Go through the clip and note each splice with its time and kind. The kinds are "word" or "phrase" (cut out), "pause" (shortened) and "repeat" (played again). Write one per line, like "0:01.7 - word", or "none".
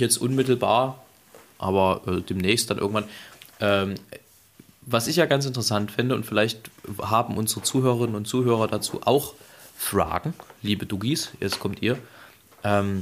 0:03.5 - pause